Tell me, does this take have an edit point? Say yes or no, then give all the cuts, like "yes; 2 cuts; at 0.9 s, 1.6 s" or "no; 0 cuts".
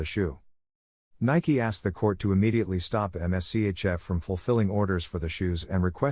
no; 0 cuts